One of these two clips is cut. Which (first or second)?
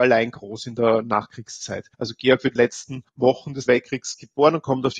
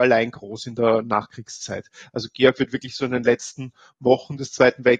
first